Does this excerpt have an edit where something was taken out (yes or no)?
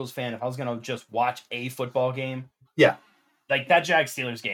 no